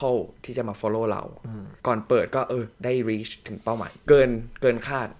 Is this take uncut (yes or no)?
no